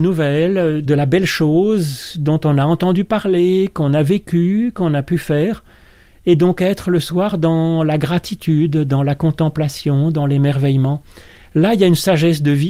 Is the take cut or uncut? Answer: uncut